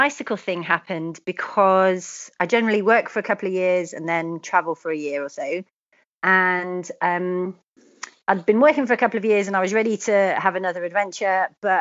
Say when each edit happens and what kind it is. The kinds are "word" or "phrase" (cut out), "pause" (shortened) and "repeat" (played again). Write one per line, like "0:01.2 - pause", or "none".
none